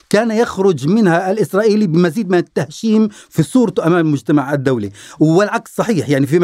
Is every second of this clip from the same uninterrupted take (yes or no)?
yes